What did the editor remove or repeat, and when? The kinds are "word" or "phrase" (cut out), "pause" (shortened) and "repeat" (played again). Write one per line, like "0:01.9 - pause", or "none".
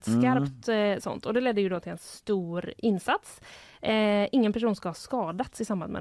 none